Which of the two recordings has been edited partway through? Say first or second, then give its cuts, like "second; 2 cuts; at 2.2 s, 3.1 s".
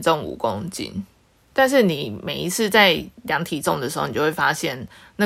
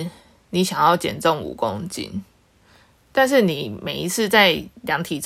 first; 1 cut; at 1.4 s